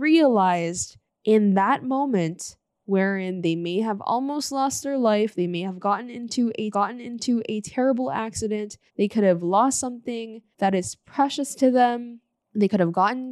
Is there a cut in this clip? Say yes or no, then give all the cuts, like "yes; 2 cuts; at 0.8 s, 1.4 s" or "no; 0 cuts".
yes; 5 cuts; at 1.1 s, 6.7 s, 8.9 s, 10.5 s, 12.4 s